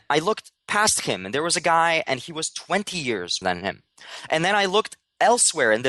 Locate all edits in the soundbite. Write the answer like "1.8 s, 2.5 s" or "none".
3.4 s